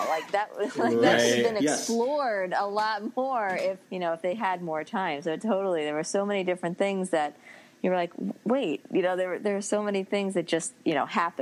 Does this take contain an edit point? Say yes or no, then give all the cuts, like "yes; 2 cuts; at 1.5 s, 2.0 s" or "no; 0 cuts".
yes; 1 cut; at 3.8 s